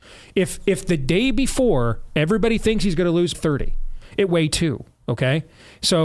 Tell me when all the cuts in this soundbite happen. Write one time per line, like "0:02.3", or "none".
0:03.3
0:04.3